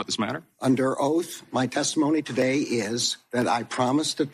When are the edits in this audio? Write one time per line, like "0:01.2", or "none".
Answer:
none